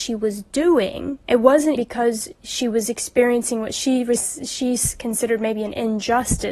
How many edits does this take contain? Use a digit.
2